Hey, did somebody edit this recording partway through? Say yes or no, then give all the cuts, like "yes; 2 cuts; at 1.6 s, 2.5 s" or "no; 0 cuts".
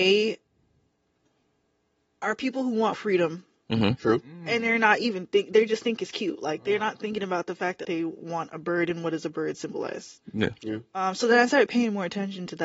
yes; 2 cuts; at 2.9 s, 7.8 s